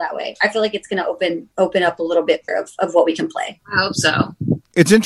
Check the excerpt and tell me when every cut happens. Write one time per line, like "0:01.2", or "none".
0:01.5
0:02.5